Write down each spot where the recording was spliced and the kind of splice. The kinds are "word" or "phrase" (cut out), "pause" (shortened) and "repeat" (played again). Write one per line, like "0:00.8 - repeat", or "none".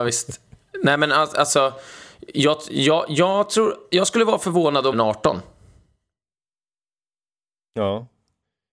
0:04.9 - phrase